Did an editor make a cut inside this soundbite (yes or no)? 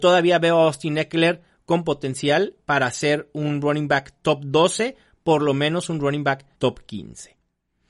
yes